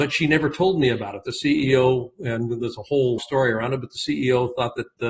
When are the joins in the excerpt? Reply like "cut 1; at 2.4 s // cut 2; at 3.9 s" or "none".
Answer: cut 1; at 3.2 s